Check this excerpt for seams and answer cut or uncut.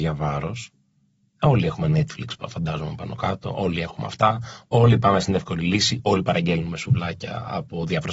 uncut